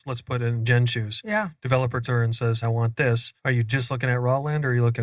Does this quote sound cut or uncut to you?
cut